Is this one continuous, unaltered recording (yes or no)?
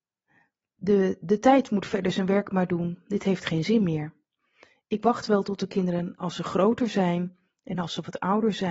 yes